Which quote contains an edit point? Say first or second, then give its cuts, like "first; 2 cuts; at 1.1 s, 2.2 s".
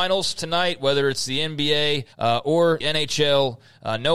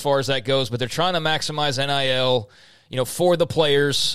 first; 2 cuts; at 2.1 s, 2.8 s